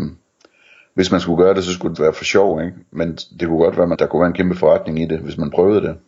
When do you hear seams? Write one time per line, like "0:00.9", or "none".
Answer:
0:01.9
0:03.9

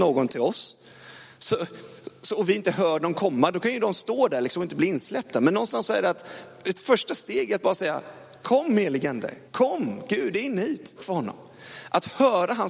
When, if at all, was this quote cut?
0:09.5
0:11.0

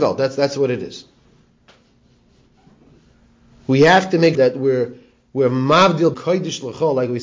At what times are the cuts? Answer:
0:04.3
0:06.1

